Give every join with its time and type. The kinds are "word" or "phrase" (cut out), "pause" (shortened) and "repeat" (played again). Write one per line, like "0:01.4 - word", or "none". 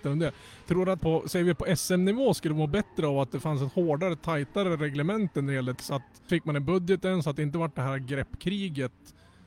0:01.0 - word
0:05.7 - word
0:06.3 - word